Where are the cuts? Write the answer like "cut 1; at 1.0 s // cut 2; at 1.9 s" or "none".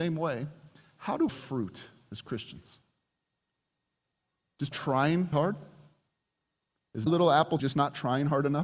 cut 1; at 1.3 s // cut 2; at 4.7 s // cut 3; at 5.3 s // cut 4; at 7.1 s // cut 5; at 7.6 s